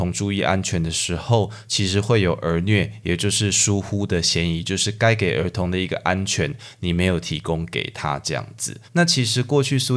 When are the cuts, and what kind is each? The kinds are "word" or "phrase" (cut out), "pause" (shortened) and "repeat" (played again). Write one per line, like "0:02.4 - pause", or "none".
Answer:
0:08.9 - pause